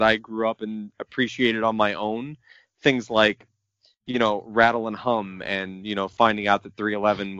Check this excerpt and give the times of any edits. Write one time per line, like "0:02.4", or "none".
none